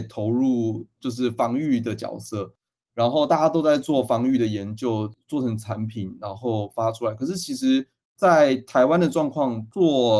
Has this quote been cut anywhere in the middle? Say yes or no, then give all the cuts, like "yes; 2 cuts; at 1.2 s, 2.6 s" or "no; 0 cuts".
no; 0 cuts